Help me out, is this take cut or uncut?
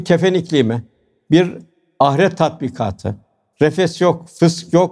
uncut